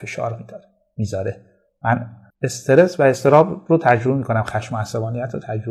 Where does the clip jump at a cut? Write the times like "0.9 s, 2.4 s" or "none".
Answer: none

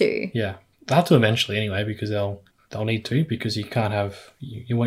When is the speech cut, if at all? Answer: 2.5 s

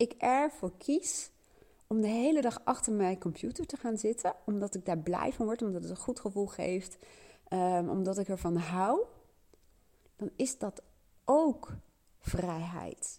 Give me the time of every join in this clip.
none

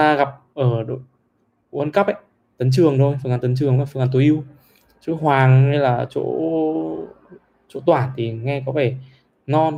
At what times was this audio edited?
none

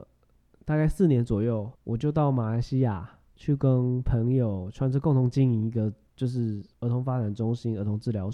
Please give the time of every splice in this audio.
1.7 s, 3.3 s, 6.7 s

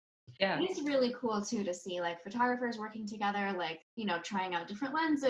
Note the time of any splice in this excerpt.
3.9 s

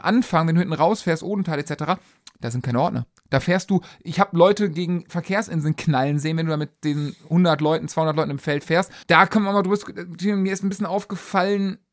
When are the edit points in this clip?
9.0 s

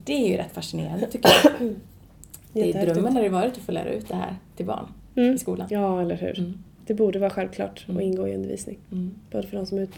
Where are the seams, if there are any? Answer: none

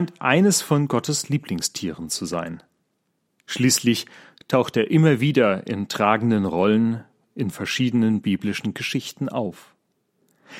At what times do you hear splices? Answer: none

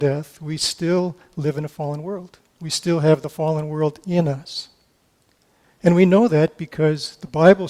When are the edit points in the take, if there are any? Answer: 2.5 s

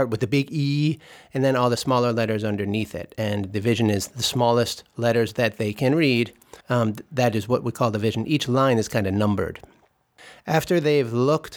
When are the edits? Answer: 6.6 s

